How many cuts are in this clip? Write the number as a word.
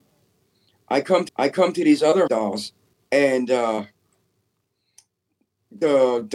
three